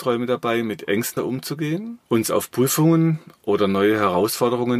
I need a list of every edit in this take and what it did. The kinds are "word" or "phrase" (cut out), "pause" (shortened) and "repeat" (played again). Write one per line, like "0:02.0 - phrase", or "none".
0:01.2 - word
0:02.1 - pause